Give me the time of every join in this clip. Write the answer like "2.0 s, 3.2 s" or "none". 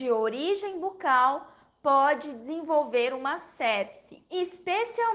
none